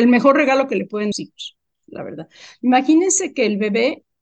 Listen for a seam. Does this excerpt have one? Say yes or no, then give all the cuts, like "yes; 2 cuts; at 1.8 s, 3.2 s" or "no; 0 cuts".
yes; 1 cut; at 1.1 s